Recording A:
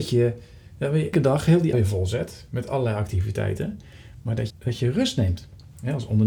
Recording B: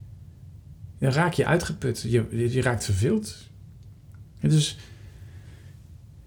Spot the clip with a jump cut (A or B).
A